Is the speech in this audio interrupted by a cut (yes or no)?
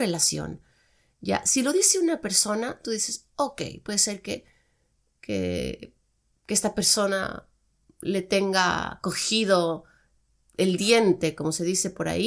no